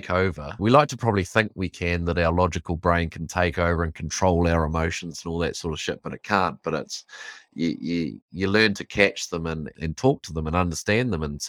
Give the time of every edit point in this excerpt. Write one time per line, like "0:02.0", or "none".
0:09.7